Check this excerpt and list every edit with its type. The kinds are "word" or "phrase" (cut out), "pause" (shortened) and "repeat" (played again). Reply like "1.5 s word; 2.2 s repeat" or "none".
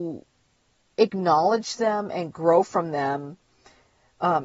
none